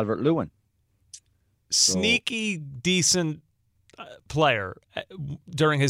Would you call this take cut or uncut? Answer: uncut